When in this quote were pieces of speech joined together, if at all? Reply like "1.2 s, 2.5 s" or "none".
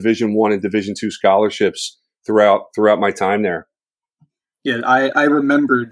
none